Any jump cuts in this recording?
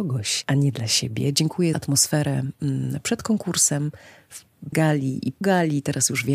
yes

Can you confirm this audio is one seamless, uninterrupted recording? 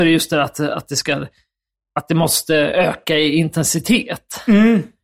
yes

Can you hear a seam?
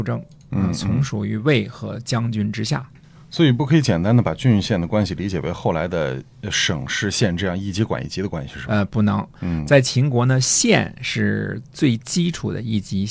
yes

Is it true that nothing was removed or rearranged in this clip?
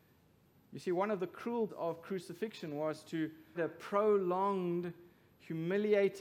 no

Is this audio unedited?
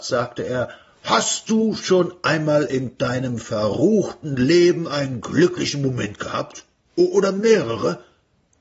yes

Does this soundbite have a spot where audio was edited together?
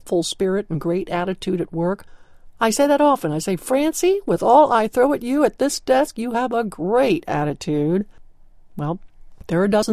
no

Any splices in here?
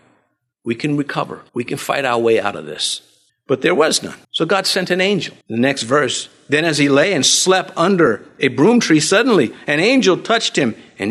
yes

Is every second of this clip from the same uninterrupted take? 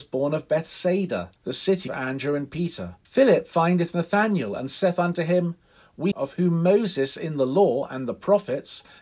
no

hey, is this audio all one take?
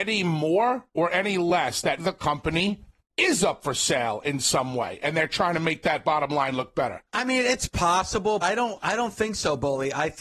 no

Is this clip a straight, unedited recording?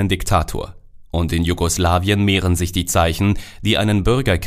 yes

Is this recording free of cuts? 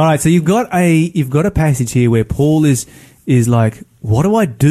yes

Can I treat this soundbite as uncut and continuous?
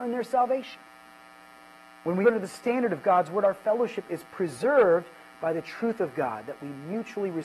no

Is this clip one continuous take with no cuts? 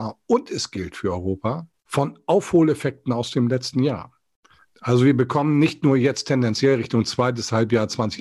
yes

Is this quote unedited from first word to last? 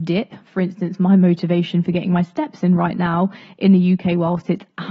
yes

